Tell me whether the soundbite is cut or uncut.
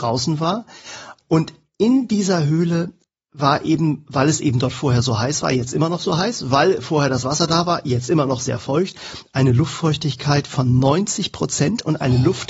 uncut